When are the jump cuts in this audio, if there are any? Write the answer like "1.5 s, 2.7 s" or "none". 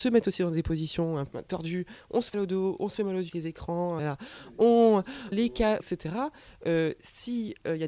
1.3 s, 2.3 s, 3.3 s, 4.0 s, 5.3 s, 5.8 s

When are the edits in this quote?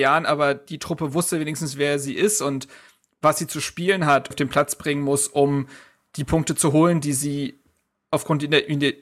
4.3 s

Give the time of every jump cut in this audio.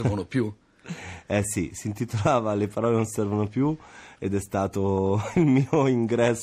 none

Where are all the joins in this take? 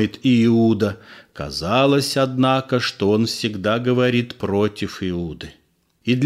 none

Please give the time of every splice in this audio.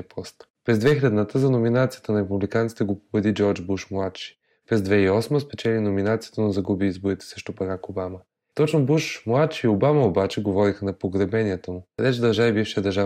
none

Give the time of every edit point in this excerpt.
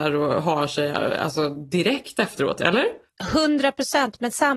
none

